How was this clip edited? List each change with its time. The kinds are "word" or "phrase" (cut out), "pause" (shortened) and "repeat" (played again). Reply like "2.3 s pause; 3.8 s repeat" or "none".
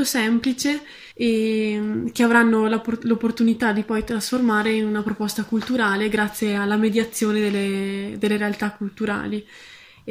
1.1 s pause